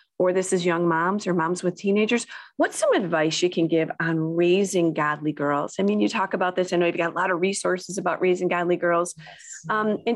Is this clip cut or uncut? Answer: uncut